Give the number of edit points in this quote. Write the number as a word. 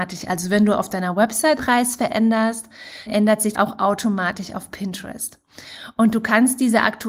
three